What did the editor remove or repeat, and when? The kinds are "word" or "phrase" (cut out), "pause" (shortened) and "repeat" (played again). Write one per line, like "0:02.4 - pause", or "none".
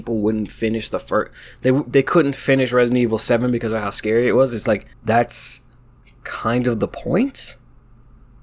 0:04.9 - pause